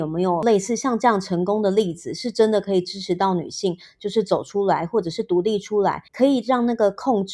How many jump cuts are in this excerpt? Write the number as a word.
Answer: one